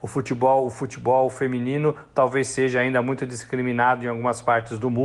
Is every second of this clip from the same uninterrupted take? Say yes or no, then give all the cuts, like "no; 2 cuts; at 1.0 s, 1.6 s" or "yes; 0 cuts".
yes; 0 cuts